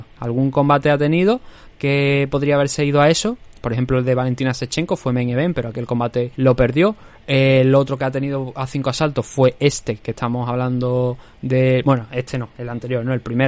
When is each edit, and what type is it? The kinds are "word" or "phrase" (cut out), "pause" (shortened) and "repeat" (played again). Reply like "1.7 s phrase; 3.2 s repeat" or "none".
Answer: 6.3 s pause